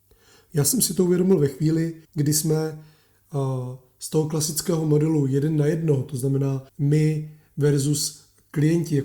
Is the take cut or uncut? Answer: cut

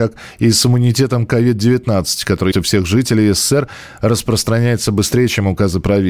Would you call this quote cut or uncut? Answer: cut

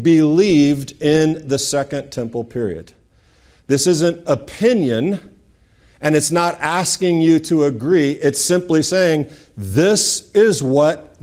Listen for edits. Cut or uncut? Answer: uncut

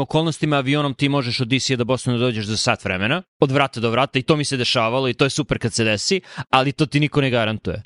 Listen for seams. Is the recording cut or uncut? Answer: cut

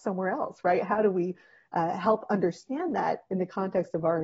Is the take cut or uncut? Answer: uncut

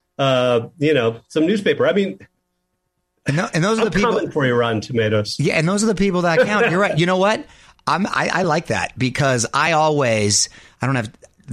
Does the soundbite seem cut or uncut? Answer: uncut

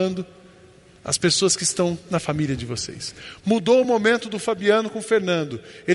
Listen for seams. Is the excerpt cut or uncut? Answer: uncut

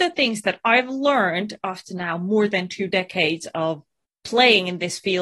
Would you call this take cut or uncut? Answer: uncut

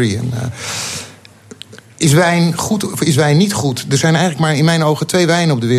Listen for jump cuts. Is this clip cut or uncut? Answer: uncut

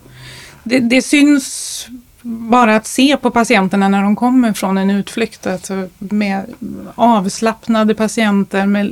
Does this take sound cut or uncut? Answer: uncut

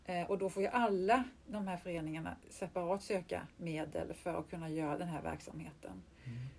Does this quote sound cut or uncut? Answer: cut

